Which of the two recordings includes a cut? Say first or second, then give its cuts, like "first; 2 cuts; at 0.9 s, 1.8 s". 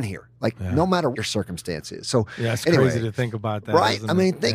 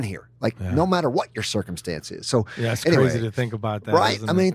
first; 1 cut; at 1.1 s